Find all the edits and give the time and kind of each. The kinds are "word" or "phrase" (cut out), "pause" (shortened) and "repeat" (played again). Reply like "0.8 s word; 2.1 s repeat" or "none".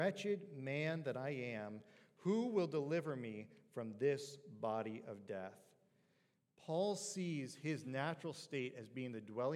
none